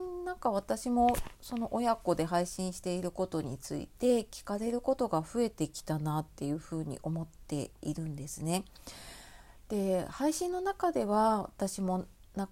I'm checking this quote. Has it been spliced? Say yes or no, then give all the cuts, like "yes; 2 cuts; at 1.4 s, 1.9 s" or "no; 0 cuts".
no; 0 cuts